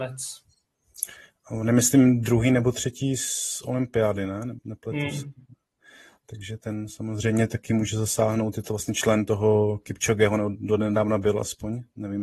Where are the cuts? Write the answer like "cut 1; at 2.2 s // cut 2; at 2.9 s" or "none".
cut 1; at 4.6 s